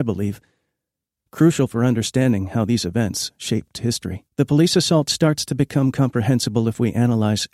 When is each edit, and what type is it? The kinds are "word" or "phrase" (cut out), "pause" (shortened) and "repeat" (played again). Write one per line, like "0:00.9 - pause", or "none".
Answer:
0:04.3 - pause